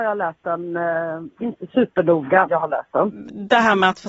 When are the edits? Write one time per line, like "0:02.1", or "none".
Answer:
0:01.4
0:02.5